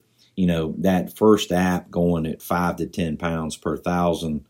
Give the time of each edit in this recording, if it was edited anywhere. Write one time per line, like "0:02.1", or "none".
none